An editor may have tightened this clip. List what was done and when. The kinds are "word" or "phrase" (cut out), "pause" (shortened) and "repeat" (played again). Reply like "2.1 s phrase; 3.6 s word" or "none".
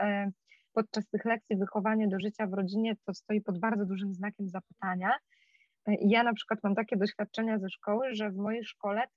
none